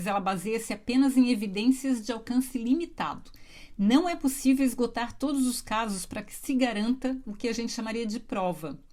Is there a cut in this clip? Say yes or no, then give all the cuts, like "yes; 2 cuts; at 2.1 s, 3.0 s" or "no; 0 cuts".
no; 0 cuts